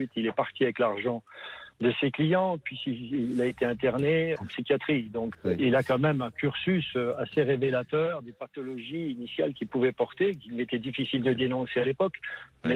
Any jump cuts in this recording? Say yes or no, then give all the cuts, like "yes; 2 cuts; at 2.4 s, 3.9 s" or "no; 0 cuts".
yes; 3 cuts; at 1.7 s, 4.4 s, 5.3 s